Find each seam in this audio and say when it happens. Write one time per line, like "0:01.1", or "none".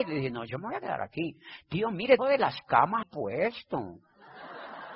0:02.2
0:03.0